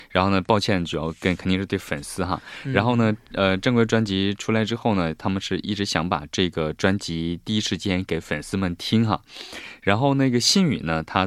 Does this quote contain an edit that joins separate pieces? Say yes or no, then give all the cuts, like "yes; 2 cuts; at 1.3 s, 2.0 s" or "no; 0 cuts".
no; 0 cuts